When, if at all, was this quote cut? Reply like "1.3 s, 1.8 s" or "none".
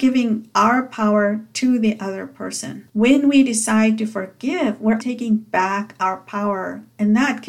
5.0 s